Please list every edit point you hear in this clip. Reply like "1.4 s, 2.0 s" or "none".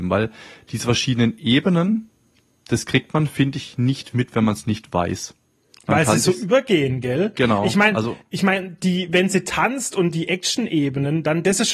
4.1 s